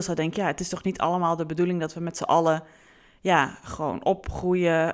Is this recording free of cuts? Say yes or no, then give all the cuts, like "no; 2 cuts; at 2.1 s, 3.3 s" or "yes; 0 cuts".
yes; 0 cuts